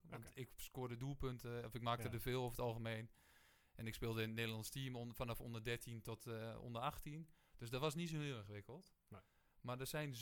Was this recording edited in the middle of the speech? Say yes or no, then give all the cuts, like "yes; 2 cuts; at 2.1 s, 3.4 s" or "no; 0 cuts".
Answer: no; 0 cuts